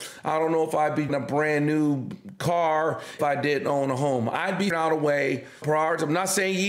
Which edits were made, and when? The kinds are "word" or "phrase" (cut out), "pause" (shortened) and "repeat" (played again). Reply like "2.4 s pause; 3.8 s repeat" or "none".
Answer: 1.1 s word; 3.2 s word; 4.7 s word; 5.6 s word